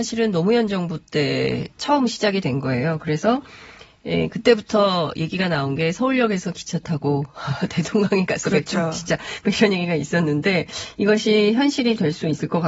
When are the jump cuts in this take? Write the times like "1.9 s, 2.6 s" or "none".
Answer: 1.7 s